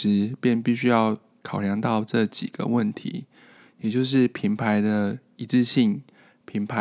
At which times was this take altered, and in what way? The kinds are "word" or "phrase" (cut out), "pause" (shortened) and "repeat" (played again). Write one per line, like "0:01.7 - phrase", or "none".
none